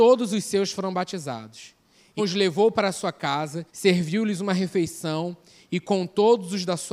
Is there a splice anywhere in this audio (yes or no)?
yes